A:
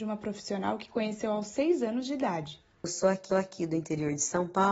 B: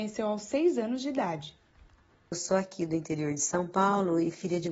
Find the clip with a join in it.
A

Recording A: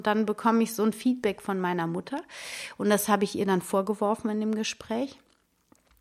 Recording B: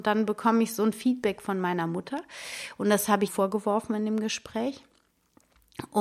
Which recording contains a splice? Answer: B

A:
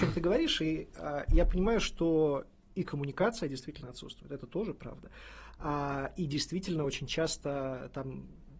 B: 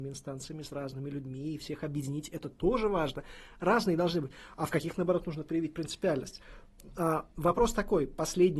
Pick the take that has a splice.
B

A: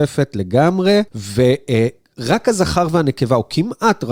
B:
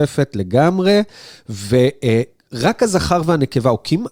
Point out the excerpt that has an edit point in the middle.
A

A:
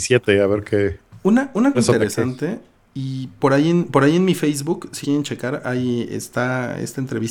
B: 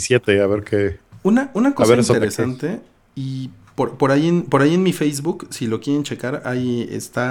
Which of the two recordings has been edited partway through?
A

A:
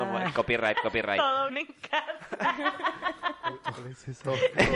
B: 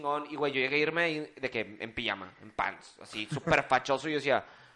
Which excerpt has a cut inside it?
A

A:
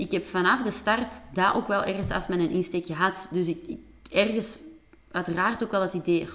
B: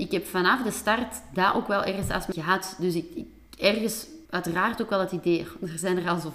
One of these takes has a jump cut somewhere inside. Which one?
B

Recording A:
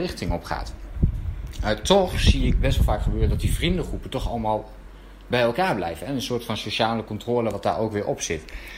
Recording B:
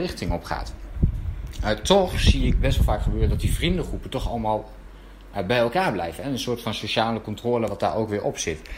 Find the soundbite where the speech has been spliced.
A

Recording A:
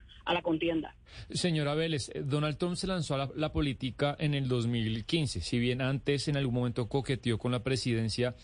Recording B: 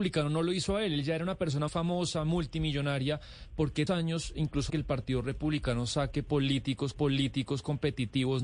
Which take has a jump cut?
B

